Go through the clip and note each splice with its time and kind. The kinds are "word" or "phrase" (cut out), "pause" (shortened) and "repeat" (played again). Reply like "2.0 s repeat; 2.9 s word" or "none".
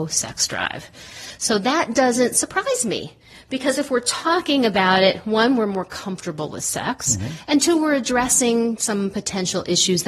none